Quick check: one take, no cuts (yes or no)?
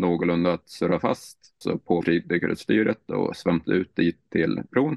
no